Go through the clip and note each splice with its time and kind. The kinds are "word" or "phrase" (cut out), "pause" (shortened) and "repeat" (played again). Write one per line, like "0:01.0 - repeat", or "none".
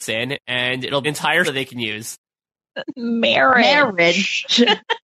0:01.0 - word
0:01.4 - word